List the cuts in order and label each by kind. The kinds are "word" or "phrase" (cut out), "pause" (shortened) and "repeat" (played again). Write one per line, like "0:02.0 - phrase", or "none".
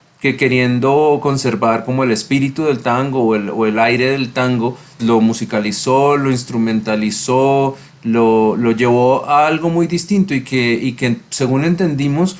0:05.0 - word